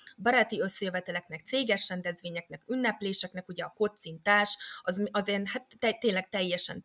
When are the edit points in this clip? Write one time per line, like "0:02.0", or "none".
none